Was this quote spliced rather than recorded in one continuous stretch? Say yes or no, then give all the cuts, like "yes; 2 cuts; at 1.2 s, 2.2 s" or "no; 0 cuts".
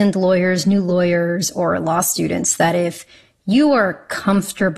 no; 0 cuts